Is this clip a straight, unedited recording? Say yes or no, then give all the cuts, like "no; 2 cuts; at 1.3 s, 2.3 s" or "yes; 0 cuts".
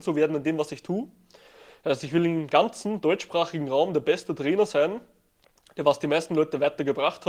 yes; 0 cuts